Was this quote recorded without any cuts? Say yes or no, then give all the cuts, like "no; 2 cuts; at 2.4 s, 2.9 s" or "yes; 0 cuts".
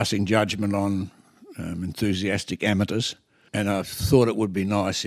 yes; 0 cuts